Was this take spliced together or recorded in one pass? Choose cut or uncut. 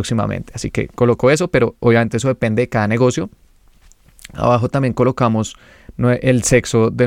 uncut